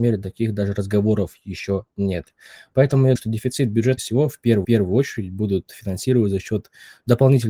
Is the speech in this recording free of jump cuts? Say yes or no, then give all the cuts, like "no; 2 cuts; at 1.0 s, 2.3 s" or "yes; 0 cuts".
no; 3 cuts; at 3.2 s, 4.0 s, 4.6 s